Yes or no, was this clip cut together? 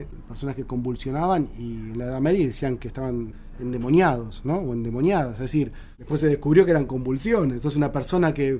no